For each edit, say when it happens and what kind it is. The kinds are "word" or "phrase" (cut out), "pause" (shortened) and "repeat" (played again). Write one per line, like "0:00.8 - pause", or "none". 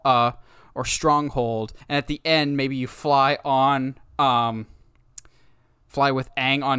0:01.8 - pause